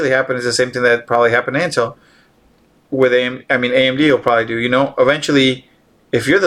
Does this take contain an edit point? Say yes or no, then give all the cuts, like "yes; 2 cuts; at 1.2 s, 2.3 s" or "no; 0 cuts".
no; 0 cuts